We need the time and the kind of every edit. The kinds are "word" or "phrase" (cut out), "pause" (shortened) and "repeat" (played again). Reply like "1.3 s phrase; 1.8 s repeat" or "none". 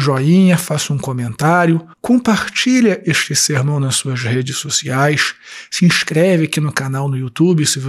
1.9 s pause